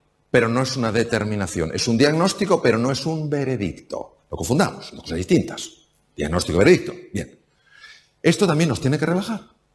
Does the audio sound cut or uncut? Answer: uncut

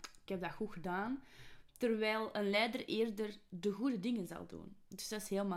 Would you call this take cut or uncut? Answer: uncut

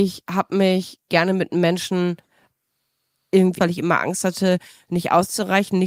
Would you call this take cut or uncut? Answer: cut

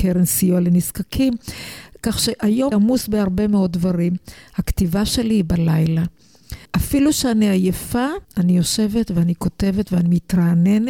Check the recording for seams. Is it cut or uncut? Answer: cut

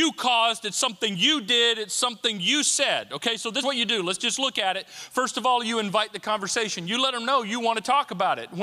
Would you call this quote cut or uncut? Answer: cut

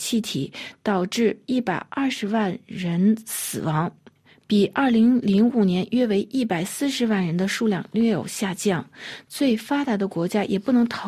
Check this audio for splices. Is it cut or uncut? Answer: uncut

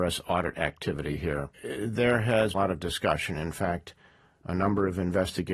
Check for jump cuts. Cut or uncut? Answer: cut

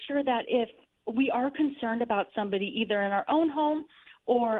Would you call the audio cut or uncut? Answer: uncut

